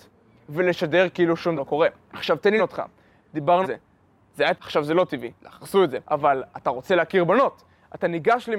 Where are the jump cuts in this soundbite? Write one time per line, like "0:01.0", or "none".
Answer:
0:01.6
0:02.0
0:02.6
0:03.6
0:04.5
0:05.4
0:06.0